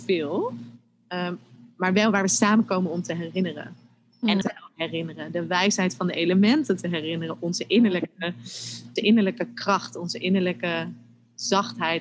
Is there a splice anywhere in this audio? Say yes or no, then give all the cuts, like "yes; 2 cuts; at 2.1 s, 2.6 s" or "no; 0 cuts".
yes; 2 cuts; at 4.4 s, 9.0 s